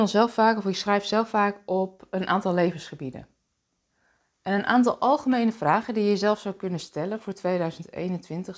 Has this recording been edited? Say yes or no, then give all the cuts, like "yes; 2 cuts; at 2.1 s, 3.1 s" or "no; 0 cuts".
no; 0 cuts